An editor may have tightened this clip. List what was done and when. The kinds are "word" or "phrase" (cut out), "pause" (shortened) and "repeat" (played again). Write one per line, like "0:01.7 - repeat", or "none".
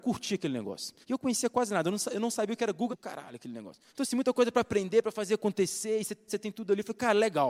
0:01.0 - pause
0:02.9 - phrase
0:03.9 - pause
0:06.3 - word